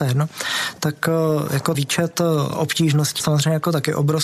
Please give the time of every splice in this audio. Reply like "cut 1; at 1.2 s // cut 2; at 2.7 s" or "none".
cut 1; at 1.7 s // cut 2; at 3.2 s